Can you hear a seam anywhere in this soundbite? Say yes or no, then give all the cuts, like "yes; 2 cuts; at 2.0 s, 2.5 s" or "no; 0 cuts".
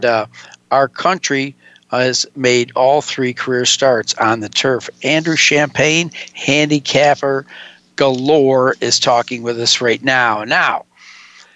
no; 0 cuts